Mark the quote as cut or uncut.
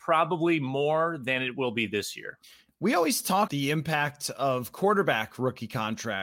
cut